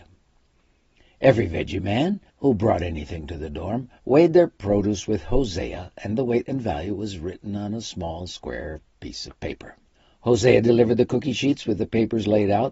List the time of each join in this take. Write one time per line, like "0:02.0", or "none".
0:02.3
0:04.0
0:09.9